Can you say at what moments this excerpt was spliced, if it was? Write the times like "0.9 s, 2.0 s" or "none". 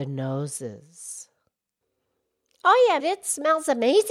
3.0 s